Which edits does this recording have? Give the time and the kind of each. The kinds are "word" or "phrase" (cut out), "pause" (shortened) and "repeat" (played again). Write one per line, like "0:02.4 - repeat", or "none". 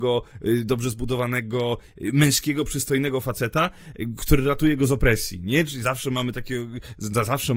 none